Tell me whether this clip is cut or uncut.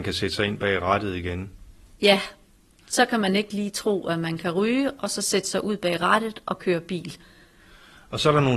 uncut